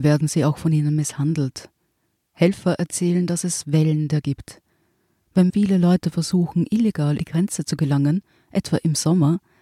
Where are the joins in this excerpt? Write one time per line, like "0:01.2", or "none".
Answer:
0:04.2
0:05.5
0:07.2